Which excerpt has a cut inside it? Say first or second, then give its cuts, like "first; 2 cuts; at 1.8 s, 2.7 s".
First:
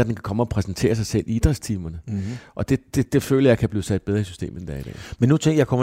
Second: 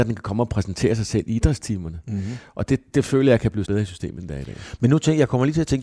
second; 2 cuts; at 2.9 s, 3.7 s